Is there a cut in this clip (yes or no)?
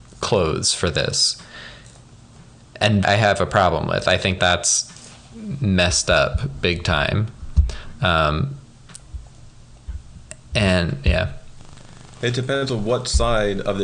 yes